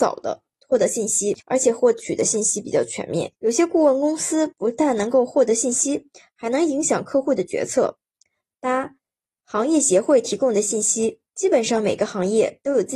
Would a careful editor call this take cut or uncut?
cut